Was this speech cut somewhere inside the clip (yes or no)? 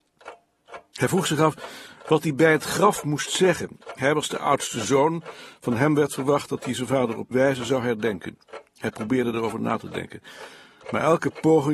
yes